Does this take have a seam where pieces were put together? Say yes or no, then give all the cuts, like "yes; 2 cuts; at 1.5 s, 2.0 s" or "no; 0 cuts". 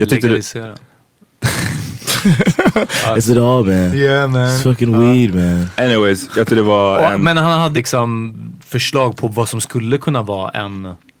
yes; 3 cuts; at 3.2 s, 6.5 s, 7.7 s